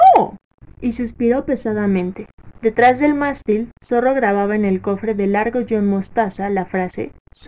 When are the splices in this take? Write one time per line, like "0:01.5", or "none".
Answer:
none